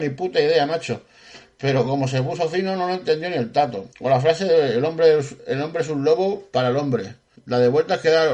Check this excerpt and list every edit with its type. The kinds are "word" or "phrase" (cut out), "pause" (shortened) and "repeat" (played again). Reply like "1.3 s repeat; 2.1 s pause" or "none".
3.9 s pause; 7.4 s pause